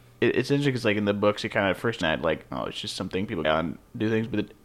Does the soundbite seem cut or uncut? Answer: cut